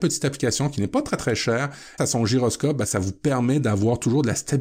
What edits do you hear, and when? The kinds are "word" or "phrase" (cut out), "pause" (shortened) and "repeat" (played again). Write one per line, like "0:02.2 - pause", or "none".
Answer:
0:02.0 - phrase